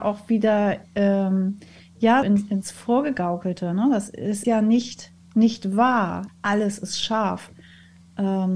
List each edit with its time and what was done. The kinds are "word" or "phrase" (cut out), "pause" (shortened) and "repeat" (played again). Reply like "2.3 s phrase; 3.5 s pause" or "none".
2.2 s word; 4.4 s word; 6.3 s word